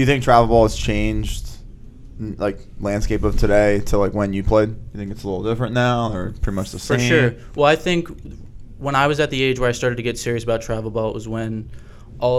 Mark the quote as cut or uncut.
uncut